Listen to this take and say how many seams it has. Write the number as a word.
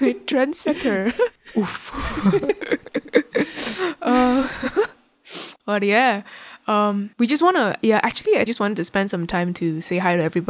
three